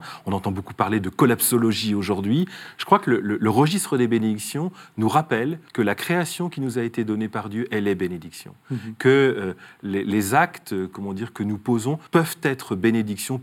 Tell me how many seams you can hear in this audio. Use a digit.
2